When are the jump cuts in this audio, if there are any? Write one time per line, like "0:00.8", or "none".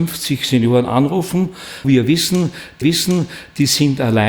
0:01.8
0:02.8